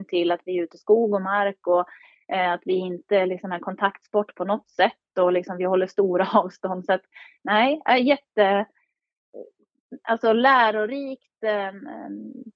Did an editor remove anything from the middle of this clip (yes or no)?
no